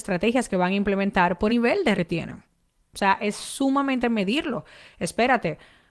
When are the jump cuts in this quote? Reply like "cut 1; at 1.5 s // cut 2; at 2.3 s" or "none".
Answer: cut 1; at 1.5 s // cut 2; at 1.9 s // cut 3; at 4.0 s

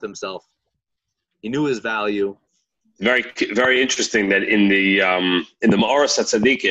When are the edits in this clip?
cut 1; at 2.5 s

